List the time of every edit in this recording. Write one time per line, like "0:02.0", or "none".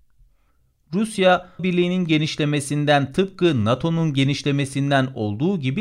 0:01.6